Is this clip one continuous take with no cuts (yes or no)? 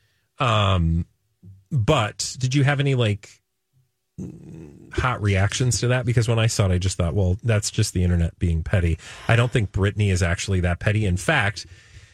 yes